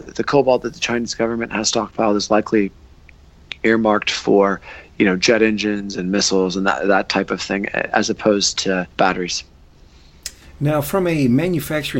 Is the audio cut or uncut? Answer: cut